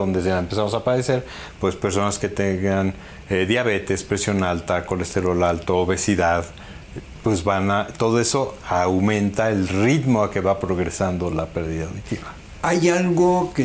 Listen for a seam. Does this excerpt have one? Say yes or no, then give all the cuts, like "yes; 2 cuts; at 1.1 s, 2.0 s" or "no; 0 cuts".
no; 0 cuts